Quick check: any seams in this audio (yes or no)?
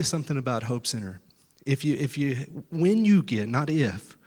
no